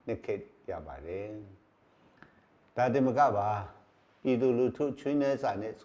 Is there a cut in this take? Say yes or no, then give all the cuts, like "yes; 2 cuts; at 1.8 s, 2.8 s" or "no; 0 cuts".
no; 0 cuts